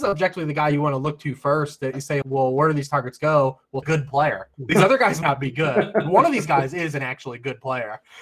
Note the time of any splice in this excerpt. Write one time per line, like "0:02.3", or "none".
0:02.2
0:03.8
0:04.5
0:05.2